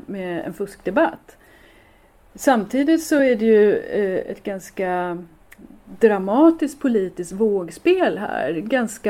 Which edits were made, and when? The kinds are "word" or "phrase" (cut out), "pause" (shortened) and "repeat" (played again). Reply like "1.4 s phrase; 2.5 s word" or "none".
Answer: none